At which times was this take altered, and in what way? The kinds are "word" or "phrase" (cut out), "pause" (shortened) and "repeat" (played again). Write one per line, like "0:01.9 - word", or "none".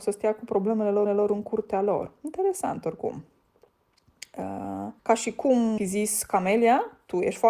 0:01.1 - repeat
0:05.0 - pause
0:05.8 - phrase

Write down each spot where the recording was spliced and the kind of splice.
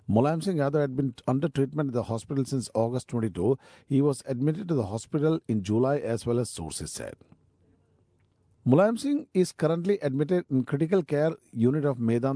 none

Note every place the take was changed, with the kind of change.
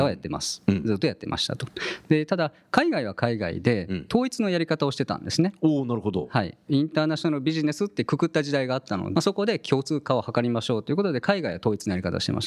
0:09.2 - phrase

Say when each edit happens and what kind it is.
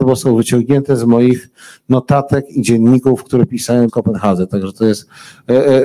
0:03.9 - word

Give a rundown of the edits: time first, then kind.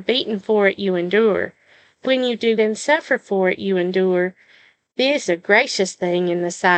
0:02.0 - word
0:02.6 - word
0:05.3 - word

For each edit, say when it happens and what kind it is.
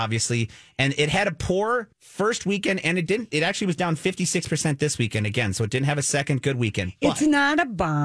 0:01.9 - pause

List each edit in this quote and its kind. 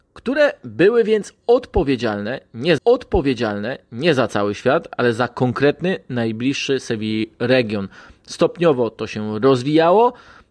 0:02.8 - repeat

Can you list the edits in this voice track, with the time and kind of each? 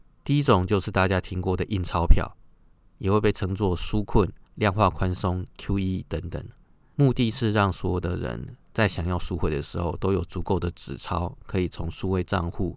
0:04.4 - pause

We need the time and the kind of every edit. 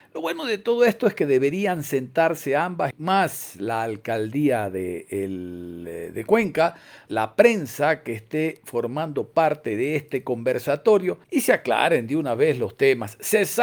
0:02.9 - word
0:07.1 - word
0:11.2 - pause

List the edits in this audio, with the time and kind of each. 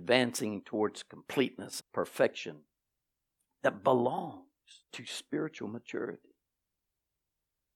0:01.8 - word
0:04.8 - pause

